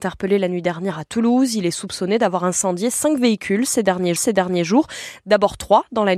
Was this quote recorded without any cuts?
no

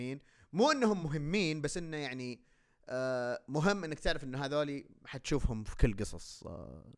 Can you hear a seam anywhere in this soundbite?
no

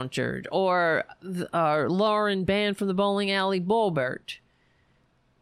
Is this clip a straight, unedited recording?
yes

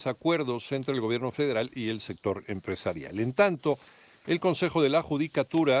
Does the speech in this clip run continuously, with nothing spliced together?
yes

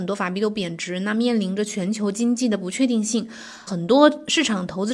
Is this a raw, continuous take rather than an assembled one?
no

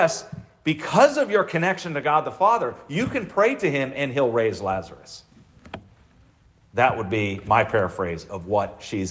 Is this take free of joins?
yes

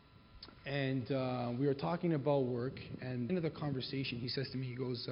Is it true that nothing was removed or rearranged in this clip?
no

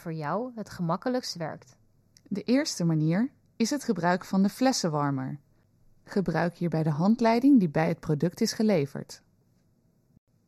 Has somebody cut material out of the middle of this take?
no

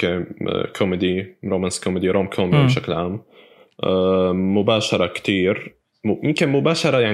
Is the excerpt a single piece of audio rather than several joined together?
yes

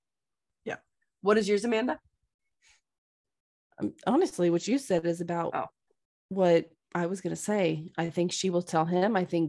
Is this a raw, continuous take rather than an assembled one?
yes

